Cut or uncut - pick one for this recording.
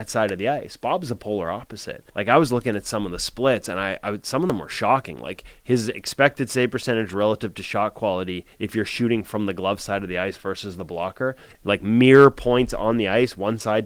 cut